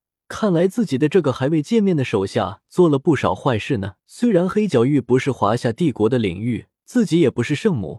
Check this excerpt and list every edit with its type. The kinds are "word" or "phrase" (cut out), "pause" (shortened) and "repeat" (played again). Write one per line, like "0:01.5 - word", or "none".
0:04.0 - pause
0:06.8 - pause